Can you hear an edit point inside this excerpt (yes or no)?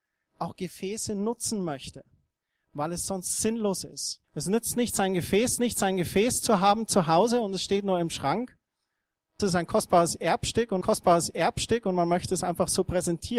yes